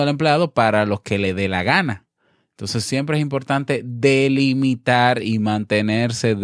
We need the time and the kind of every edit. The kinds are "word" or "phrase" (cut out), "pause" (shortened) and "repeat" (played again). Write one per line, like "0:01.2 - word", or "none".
none